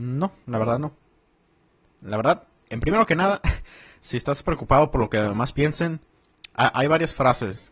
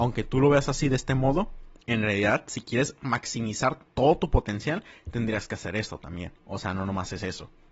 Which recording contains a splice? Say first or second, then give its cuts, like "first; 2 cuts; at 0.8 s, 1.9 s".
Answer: second; 2 cuts; at 1.8 s, 6.4 s